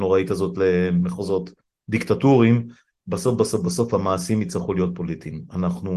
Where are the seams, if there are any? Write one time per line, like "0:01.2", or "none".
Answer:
none